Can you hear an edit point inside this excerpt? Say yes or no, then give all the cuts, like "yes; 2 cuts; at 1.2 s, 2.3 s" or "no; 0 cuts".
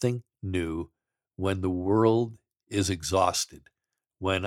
no; 0 cuts